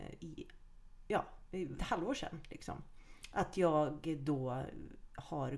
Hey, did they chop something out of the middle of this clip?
yes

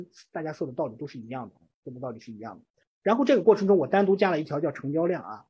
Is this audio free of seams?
yes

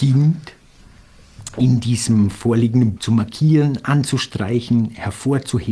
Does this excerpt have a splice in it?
yes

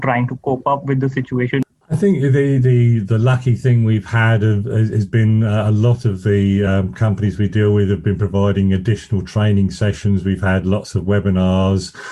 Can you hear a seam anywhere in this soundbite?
no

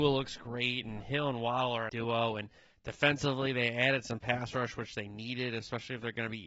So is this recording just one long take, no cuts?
no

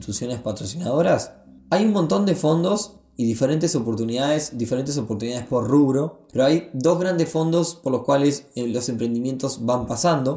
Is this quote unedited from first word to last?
yes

